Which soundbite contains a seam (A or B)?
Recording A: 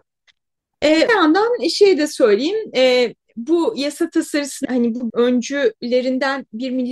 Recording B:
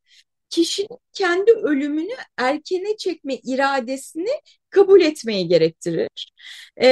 A